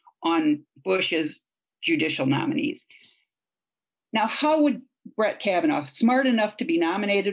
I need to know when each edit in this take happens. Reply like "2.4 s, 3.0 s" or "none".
none